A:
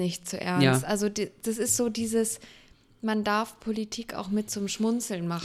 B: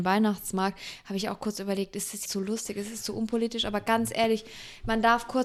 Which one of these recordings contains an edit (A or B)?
B